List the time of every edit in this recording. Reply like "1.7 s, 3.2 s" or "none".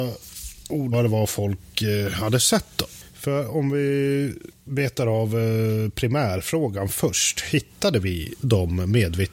0.9 s, 3.1 s

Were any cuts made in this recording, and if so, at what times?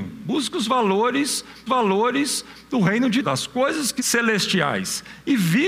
1.7 s, 3.2 s, 4.0 s

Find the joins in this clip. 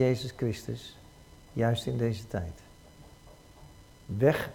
none

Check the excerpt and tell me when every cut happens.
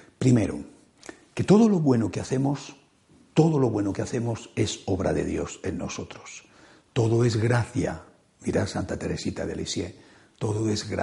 none

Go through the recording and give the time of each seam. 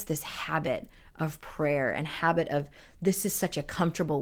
none

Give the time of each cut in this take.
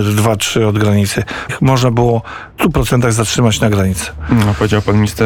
1.5 s, 2.6 s

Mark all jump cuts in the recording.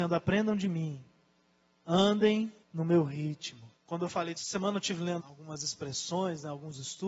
2.6 s, 3.8 s, 4.4 s, 5.2 s

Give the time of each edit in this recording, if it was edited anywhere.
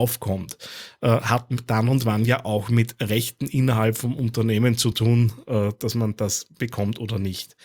none

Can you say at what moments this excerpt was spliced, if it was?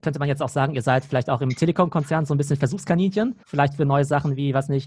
3.4 s

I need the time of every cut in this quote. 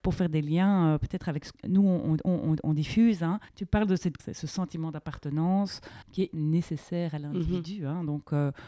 1.5 s, 2.3 s, 3.5 s, 4.2 s, 6.0 s, 6.3 s

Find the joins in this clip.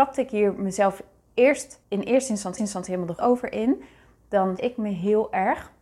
1.8 s, 2.6 s, 3.2 s, 4.6 s

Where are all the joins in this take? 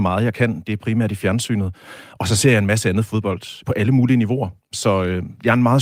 3.6 s

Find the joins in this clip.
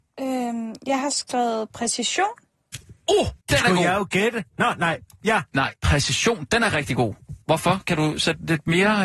3.4 s, 5.8 s, 7.4 s

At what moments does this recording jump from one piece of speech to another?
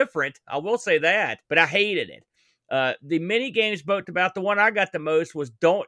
1.4 s, 4.0 s

